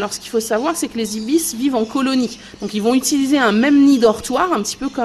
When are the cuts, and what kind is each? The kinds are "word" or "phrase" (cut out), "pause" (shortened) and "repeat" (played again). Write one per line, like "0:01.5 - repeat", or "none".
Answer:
none